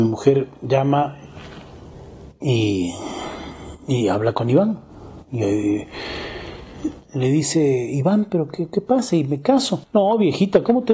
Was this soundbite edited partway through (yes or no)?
no